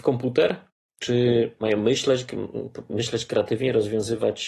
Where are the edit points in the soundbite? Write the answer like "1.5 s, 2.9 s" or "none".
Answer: 2.9 s